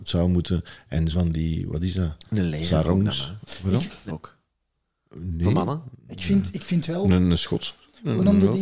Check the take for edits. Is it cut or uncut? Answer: cut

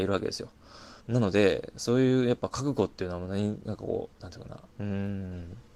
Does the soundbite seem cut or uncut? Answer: cut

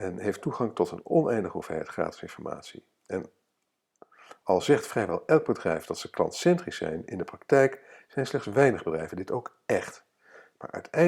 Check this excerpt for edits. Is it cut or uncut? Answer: uncut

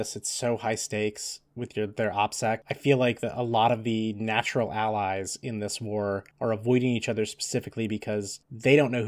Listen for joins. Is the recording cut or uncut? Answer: uncut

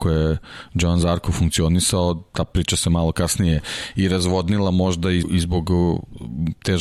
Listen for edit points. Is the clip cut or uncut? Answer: cut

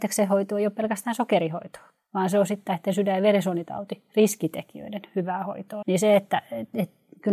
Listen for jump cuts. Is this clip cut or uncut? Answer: cut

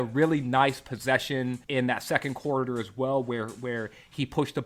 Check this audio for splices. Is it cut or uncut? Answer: cut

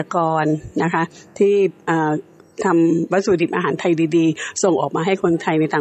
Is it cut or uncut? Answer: uncut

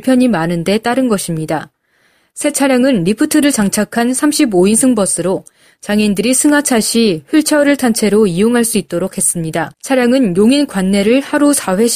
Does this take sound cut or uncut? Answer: cut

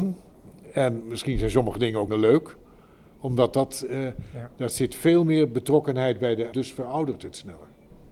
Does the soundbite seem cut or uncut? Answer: cut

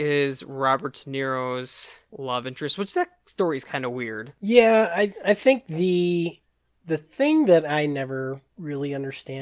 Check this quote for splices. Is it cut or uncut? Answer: uncut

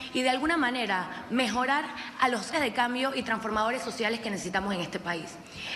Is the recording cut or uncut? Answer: cut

